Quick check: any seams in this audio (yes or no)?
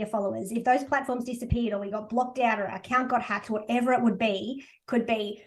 no